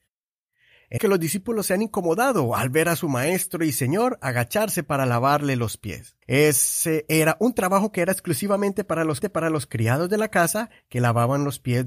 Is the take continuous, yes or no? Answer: no